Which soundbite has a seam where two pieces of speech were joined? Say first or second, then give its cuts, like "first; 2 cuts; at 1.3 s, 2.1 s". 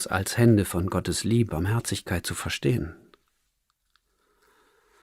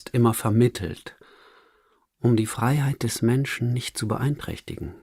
first; 1 cut; at 1.5 s